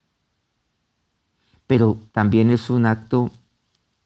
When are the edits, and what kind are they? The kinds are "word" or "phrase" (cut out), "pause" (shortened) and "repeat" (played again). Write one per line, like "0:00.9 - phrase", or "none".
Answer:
0:02.1 - pause